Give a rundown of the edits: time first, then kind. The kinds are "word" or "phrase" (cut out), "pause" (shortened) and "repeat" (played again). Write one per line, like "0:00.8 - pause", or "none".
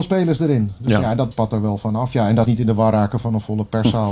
0:01.3 - word
0:02.4 - phrase